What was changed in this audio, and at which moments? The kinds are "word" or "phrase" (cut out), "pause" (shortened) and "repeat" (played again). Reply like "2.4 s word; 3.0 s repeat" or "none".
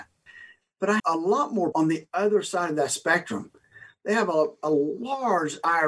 1.0 s word; 1.7 s word